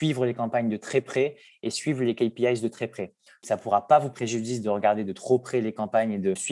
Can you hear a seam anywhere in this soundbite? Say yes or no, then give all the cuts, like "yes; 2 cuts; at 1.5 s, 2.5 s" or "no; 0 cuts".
yes; 1 cut; at 4.1 s